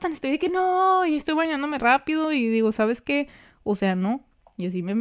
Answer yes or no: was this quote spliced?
no